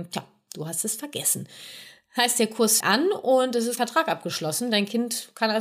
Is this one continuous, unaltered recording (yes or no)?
no